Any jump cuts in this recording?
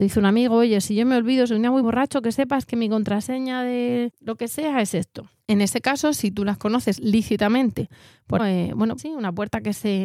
yes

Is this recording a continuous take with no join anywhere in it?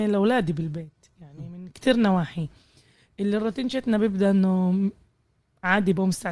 yes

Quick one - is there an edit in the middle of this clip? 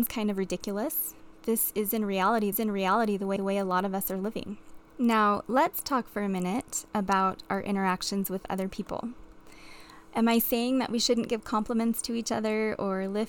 yes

